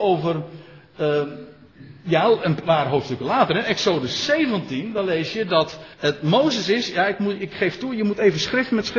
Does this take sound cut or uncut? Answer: cut